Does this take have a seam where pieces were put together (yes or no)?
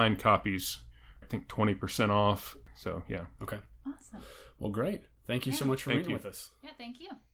yes